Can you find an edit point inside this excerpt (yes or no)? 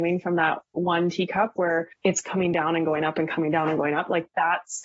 yes